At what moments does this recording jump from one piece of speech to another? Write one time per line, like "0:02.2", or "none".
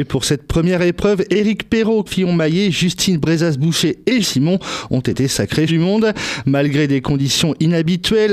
0:02.1
0:04.2
0:05.7

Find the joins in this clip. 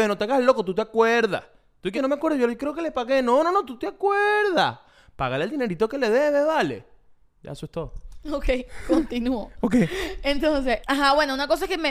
0:01.9
0:10.8

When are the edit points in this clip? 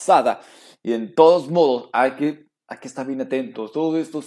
none

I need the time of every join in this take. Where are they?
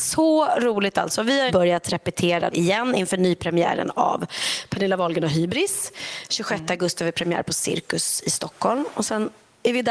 0:01.5
0:02.5

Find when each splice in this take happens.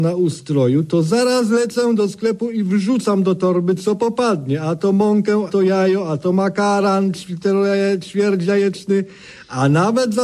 0:05.5

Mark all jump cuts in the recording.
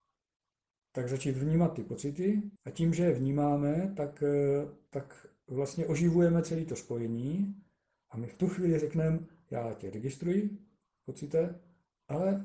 0:02.6

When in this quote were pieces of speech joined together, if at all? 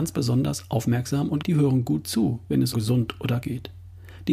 0:01.4
0:02.7
0:03.4

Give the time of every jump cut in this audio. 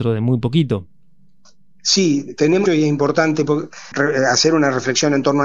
0:02.7
0:03.9

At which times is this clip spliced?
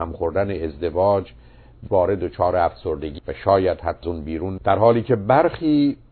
0:01.9
0:03.2
0:04.0
0:04.6

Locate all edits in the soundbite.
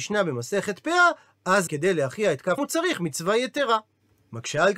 0:01.7
0:02.6

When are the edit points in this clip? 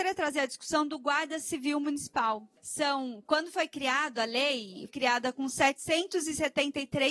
0:04.9

